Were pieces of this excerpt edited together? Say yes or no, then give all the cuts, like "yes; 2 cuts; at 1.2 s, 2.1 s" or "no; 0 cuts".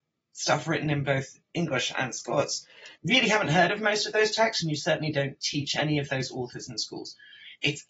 yes; 2 cuts; at 1.4 s, 3.0 s